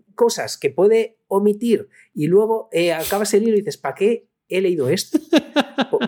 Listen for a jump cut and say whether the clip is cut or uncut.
uncut